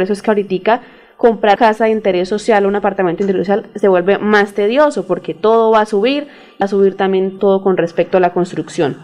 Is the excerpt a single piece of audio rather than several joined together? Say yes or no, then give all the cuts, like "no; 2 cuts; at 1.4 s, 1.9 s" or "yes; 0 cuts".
no; 3 cuts; at 1.6 s, 6.6 s, 7.4 s